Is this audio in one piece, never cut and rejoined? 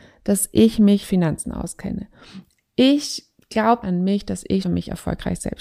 no; 3 cuts; at 1.0 s, 3.8 s, 4.6 s

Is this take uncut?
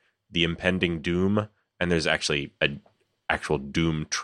yes; 0 cuts

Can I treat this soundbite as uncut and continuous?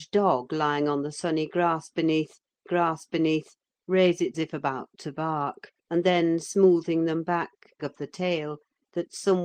no; 4 cuts; at 2.7 s, 4.3 s, 5.8 s, 7.8 s

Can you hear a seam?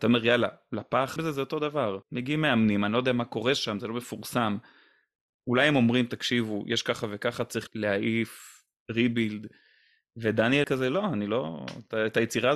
yes; 4 cuts; at 1.2 s, 2.0 s, 7.7 s, 10.6 s

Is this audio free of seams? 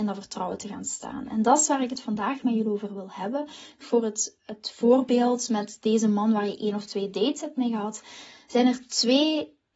no; 1 cut; at 3.8 s

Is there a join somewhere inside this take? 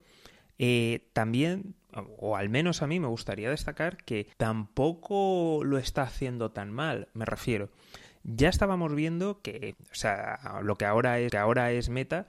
yes; 3 cuts; at 4.3 s, 9.7 s, 11.3 s

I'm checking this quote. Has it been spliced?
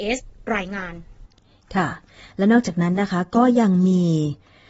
no; 0 cuts

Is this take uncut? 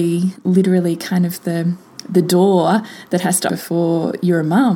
no; 1 cut; at 3.5 s

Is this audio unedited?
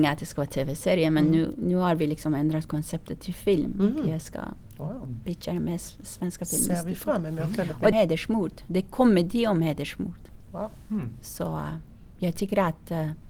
no; 1 cut; at 7.9 s

